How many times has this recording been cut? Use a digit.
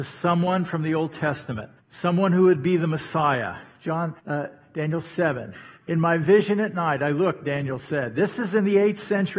3